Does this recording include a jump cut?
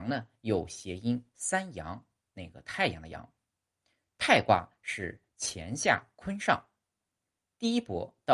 no; 0 cuts

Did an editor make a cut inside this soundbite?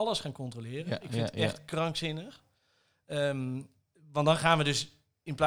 no; 0 cuts

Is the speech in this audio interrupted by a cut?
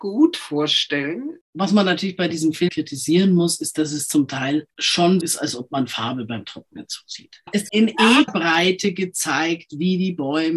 yes; 4 cuts; at 2.7 s, 5.2 s, 7.7 s, 8.3 s

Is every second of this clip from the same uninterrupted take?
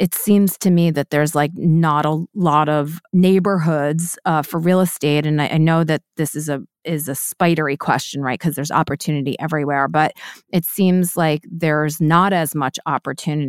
yes; 0 cuts

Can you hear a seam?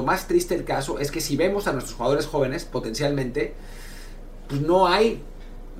no; 0 cuts

